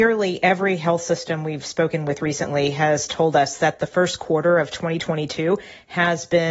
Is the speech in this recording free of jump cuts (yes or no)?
yes